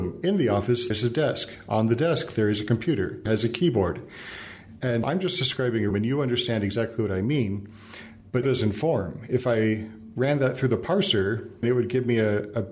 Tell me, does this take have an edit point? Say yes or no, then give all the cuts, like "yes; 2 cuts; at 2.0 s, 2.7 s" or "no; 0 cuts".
yes; 6 cuts; at 0.9 s, 3.3 s, 5.0 s, 5.9 s, 8.4 s, 11.6 s